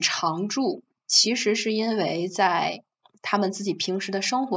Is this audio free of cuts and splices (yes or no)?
yes